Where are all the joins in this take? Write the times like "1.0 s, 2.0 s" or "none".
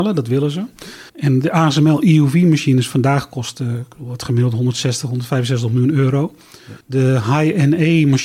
1.1 s, 6.8 s